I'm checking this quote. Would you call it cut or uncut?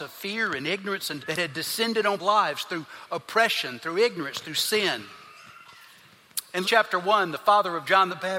cut